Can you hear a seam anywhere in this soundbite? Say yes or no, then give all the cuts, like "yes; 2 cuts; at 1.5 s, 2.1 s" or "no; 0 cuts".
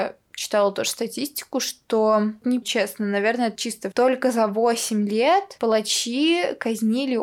yes; 3 cuts; at 2.6 s, 3.5 s, 3.9 s